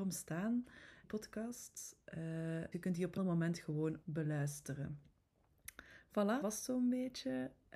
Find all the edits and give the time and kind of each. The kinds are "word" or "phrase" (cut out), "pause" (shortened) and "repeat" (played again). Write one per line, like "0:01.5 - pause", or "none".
0:01.0 - word
0:02.7 - word
0:03.2 - word
0:04.0 - phrase
0:06.4 - word